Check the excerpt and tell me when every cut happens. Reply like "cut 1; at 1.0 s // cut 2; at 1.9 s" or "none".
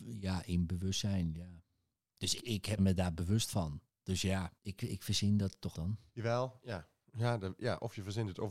cut 1; at 2.4 s // cut 2; at 2.8 s // cut 3; at 4.6 s // cut 4; at 5.7 s // cut 5; at 6.1 s